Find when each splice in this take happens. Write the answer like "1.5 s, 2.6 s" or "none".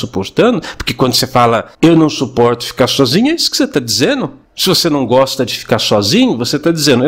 1.7 s, 4.4 s